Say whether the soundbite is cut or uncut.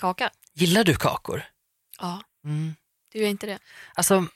uncut